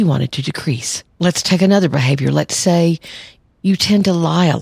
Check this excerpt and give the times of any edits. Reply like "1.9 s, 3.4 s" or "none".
1.1 s